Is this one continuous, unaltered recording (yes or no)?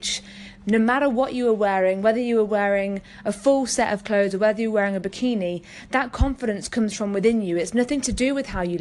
yes